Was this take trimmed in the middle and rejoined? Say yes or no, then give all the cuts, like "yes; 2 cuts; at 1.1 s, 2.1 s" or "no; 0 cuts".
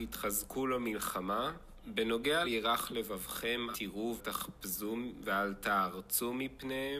yes; 3 cuts; at 2.4 s, 3.7 s, 4.2 s